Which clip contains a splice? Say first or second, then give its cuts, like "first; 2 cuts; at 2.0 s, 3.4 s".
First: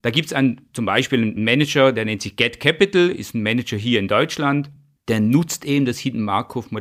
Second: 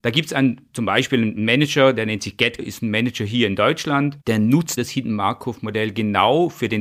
second; 3 cuts; at 2.6 s, 4.2 s, 4.8 s